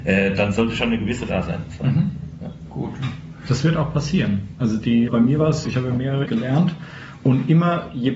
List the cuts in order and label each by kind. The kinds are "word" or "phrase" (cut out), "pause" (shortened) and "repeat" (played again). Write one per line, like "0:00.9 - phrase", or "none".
0:01.3 - word
0:05.1 - word
0:05.7 - word
0:06.3 - word